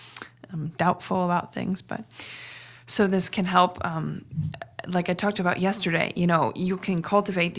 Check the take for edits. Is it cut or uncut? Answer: uncut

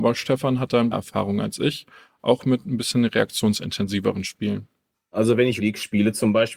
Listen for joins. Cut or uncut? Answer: cut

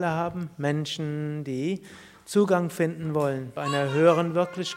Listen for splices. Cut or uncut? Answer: cut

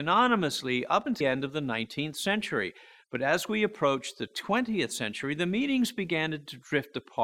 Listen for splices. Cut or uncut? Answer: cut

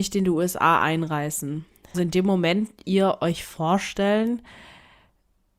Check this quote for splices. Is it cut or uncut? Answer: cut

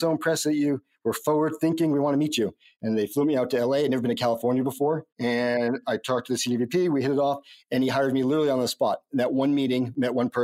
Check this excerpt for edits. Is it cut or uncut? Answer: uncut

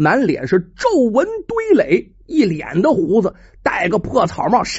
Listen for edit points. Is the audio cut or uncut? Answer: uncut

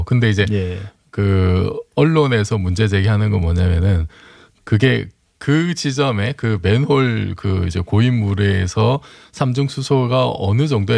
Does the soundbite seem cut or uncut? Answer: uncut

